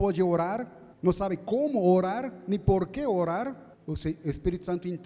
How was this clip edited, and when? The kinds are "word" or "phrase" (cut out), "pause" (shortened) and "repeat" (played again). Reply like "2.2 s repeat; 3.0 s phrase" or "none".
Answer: 0.9 s pause; 3.7 s pause

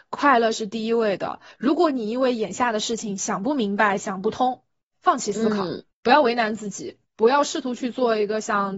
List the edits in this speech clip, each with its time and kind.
4.9 s phrase

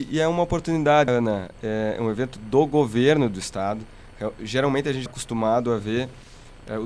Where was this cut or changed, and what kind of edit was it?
1.1 s word; 5.1 s word

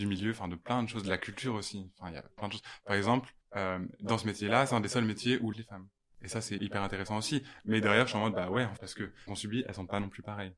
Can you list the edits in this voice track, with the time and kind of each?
2.4 s word; 3.4 s pause; 5.5 s phrase; 6.6 s word; 8.8 s word; 9.3 s phrase

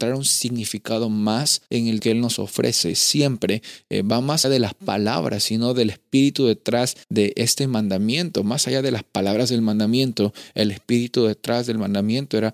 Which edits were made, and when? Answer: 1.7 s pause; 2.0 s word; 4.4 s word; 7.0 s pause

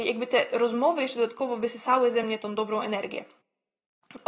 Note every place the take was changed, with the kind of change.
none

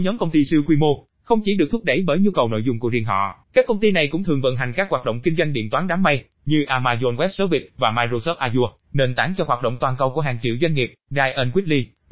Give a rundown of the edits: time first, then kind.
3.4 s pause; 11.0 s pause

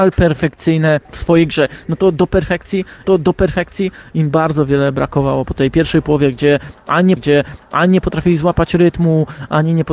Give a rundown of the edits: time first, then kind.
1.0 s pause; 3.0 s repeat; 7.2 s repeat

